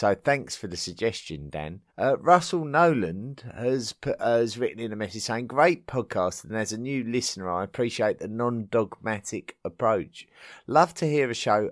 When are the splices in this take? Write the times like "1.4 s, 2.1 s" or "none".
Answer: 1.9 s